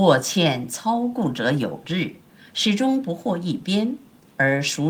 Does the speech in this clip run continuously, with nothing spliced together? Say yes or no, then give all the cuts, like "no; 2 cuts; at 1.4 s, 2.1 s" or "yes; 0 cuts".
yes; 0 cuts